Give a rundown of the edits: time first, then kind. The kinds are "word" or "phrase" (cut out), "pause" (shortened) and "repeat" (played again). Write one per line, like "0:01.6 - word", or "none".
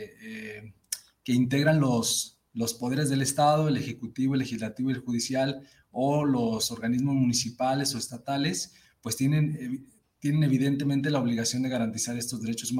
none